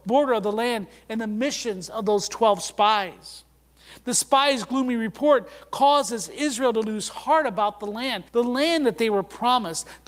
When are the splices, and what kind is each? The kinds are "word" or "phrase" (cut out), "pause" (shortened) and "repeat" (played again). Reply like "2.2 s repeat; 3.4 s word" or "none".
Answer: 8.3 s pause